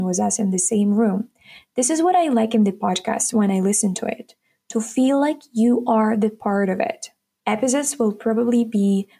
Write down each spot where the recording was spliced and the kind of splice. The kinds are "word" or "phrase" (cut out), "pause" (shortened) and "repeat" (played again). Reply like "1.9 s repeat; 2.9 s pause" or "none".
none

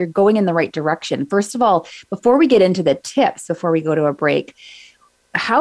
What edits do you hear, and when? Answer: none

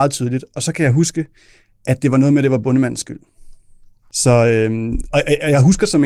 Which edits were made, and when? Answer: none

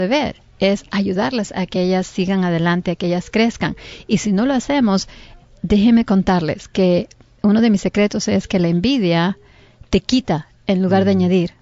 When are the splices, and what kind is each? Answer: none

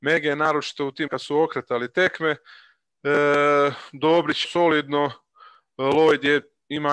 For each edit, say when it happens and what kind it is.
1.1 s word; 4.4 s phrase

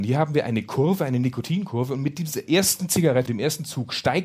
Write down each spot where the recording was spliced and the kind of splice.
3.3 s word

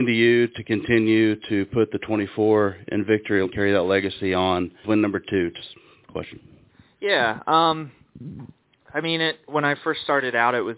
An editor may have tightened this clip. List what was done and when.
3.4 s word; 4.8 s word

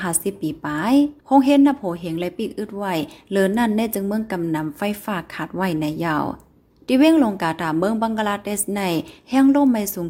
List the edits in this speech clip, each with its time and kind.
1.2 s pause

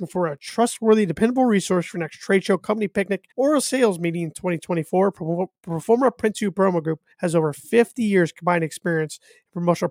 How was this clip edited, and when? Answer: 3.3 s pause; 7.1 s pause

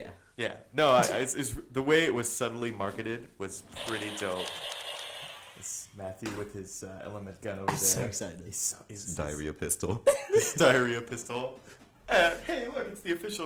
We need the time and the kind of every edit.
none

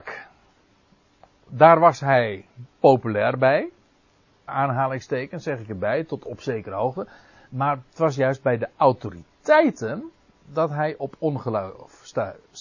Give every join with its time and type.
4.5 s word

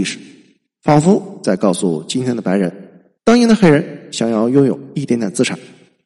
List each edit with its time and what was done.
3.2 s pause

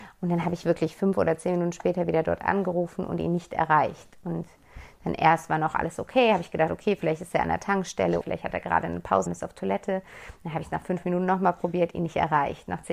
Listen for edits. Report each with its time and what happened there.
8.2 s word; 9.3 s word

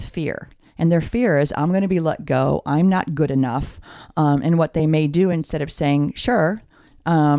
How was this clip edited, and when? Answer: none

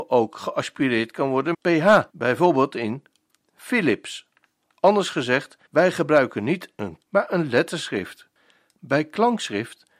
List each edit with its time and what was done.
1.5 s word; 2.1 s pause; 4.6 s pause; 5.7 s pause; 7.0 s word

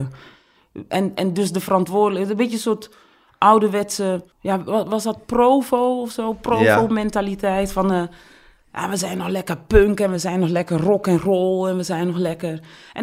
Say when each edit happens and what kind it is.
4.3 s pause

